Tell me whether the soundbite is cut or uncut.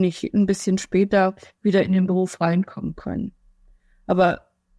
uncut